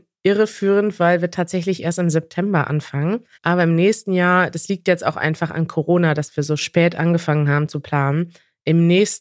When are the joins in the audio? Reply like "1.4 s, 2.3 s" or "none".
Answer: 3.3 s